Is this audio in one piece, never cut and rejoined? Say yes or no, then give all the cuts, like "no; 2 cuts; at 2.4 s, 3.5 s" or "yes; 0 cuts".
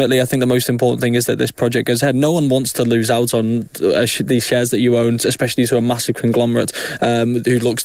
yes; 0 cuts